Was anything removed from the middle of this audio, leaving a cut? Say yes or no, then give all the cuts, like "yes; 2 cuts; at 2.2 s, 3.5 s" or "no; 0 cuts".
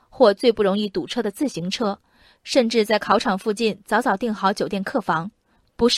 no; 0 cuts